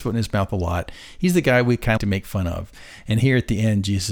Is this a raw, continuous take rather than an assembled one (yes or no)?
no